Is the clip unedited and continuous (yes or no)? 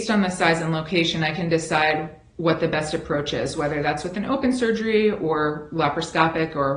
yes